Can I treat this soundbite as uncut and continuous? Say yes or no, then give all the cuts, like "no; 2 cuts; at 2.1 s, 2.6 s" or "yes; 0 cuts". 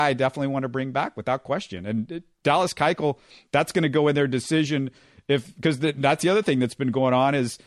yes; 0 cuts